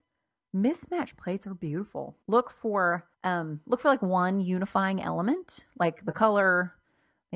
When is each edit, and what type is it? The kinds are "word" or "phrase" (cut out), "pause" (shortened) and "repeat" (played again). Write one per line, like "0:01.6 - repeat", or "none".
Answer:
0:02.2 - pause
0:03.1 - pause